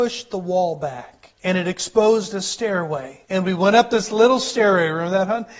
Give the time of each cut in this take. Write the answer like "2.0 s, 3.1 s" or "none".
1.4 s, 3.2 s